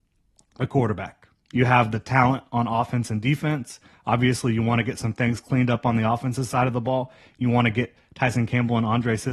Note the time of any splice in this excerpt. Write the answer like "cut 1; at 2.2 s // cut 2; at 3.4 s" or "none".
none